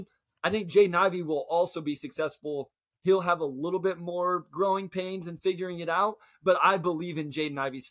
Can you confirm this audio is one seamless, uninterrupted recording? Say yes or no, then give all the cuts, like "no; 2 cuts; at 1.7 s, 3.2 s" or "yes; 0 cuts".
yes; 0 cuts